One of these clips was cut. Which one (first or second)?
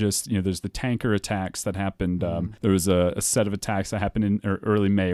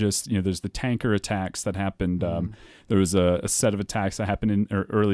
first